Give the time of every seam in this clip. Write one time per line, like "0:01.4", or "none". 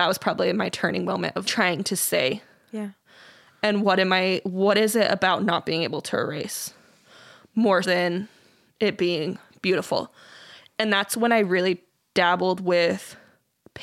0:01.4
0:07.8